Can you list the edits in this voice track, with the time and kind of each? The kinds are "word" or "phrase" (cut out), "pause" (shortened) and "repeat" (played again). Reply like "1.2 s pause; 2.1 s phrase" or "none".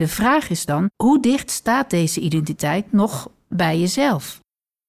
0.9 s pause